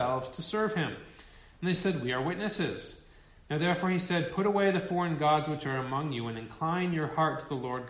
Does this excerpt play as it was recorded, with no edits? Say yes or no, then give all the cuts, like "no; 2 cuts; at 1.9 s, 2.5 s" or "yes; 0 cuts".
yes; 0 cuts